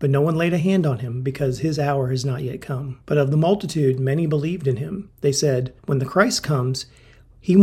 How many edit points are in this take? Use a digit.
3